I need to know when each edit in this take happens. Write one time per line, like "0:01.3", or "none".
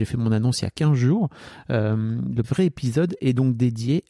0:02.4